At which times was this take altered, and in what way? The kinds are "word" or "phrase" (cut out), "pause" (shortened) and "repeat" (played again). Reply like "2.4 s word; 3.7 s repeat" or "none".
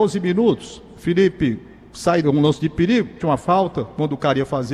2.2 s phrase; 3.2 s word